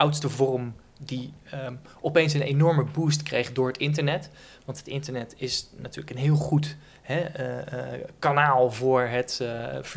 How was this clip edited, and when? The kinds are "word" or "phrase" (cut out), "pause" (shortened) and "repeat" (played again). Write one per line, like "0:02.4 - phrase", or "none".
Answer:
none